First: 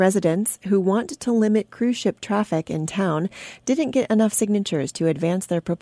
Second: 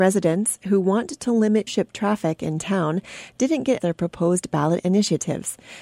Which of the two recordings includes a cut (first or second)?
second